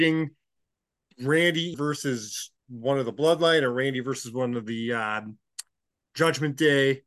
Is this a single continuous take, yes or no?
no